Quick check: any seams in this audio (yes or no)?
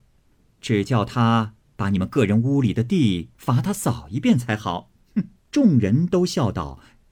yes